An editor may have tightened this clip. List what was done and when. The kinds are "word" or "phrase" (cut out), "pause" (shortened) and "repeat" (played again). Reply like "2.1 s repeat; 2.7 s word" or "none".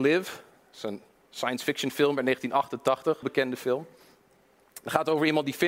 3.2 s phrase